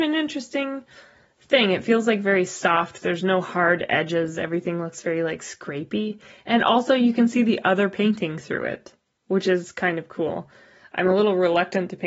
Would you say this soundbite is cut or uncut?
uncut